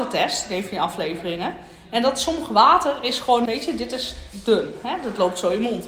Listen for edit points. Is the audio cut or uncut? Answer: cut